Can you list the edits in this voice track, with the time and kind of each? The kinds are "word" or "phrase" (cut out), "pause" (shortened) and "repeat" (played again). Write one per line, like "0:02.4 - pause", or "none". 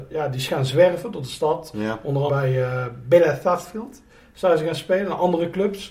0:02.3 - word